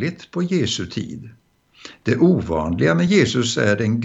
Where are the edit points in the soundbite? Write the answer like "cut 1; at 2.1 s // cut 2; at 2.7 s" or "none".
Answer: none

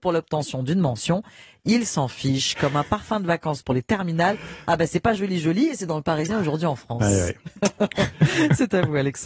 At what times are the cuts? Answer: none

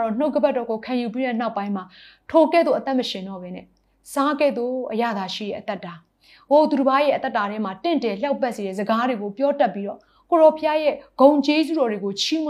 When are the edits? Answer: none

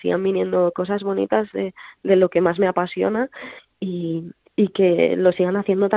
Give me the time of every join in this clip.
cut 1; at 4.4 s

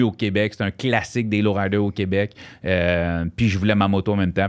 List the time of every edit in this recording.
none

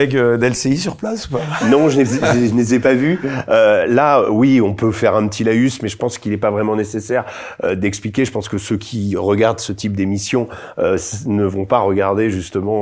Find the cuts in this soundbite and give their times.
none

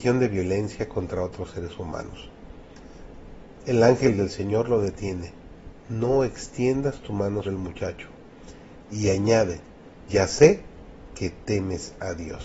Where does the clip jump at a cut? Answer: cut 1; at 7.4 s // cut 2; at 10.1 s

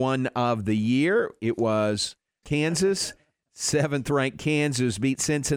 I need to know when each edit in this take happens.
cut 1; at 2.4 s

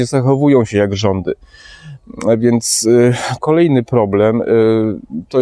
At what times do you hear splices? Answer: cut 1; at 3.4 s

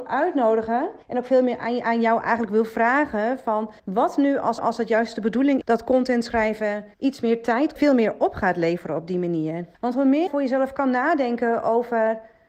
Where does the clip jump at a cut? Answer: cut 1; at 1.0 s // cut 2; at 3.8 s // cut 3; at 4.6 s // cut 4; at 5.6 s // cut 5; at 6.9 s // cut 6; at 7.8 s // cut 7; at 9.7 s // cut 8; at 10.3 s

